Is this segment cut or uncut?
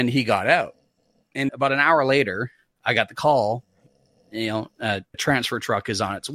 cut